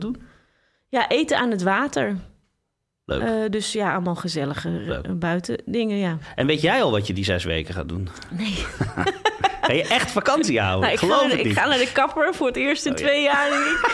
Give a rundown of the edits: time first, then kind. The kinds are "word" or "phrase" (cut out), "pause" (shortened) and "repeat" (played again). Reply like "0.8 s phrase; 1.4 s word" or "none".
none